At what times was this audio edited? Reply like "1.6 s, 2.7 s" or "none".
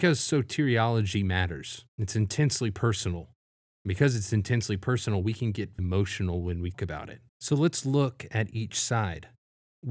1.9 s, 3.4 s, 5.8 s, 6.7 s, 7.3 s